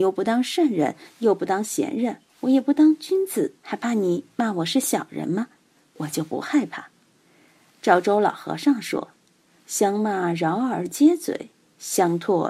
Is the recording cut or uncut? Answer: cut